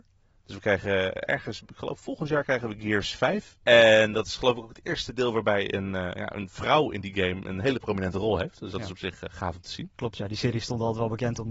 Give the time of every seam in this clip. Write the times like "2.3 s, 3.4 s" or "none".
1.7 s, 3.6 s